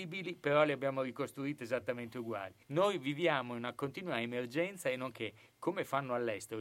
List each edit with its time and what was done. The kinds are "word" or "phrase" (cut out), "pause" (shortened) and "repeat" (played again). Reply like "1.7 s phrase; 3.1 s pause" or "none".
2.6 s pause; 5.1 s word